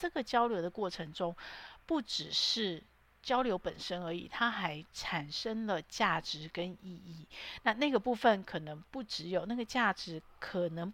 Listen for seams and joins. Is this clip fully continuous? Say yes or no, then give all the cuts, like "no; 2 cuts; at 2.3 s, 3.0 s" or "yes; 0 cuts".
yes; 0 cuts